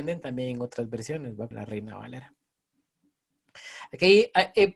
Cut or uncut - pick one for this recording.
cut